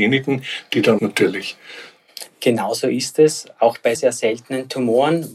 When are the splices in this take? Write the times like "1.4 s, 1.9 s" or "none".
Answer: 1.0 s, 3.9 s